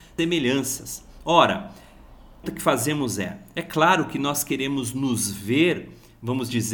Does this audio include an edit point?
yes; 1 cut; at 2.4 s

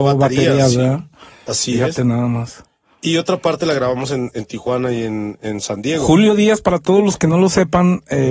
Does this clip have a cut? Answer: no; 0 cuts

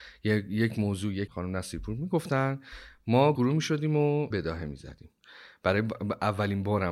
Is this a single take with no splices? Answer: no; 3 cuts; at 1.3 s, 3.4 s, 4.3 s

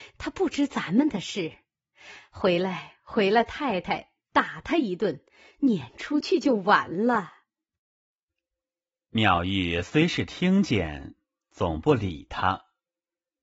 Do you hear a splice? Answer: no; 0 cuts

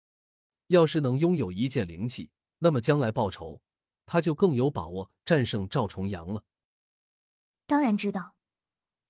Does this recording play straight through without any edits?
yes; 0 cuts

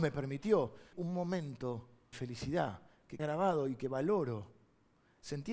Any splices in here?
yes; 3 cuts; at 0.9 s, 2.1 s, 3.2 s

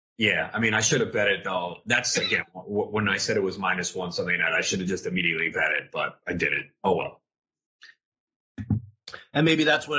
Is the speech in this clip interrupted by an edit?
no; 0 cuts

